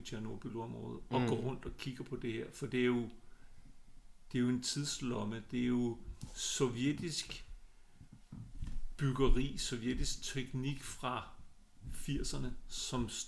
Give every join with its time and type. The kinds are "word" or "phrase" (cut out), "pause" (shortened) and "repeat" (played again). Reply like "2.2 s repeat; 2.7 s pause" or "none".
none